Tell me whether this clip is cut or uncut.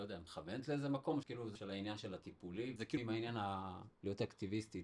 cut